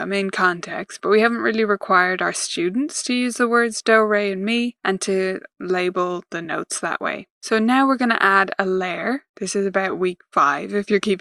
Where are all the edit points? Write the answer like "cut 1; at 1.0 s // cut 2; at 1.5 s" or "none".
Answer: cut 1; at 9.3 s